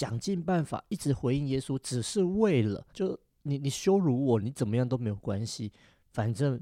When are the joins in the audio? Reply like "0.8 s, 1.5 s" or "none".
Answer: 2.9 s